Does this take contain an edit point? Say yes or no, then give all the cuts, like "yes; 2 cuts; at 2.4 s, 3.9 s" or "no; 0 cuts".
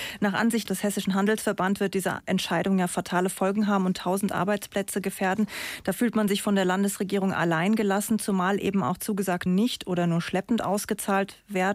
yes; 1 cut; at 9.5 s